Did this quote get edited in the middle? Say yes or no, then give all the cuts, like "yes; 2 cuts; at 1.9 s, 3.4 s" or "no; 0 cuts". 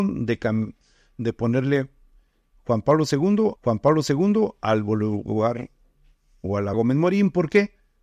yes; 2 cuts; at 3.6 s, 6.7 s